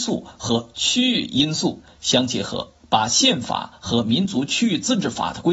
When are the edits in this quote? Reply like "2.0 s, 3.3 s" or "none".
2.8 s